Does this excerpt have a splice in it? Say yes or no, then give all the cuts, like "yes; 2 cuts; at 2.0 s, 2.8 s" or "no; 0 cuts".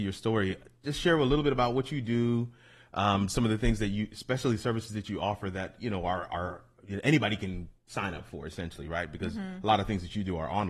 no; 0 cuts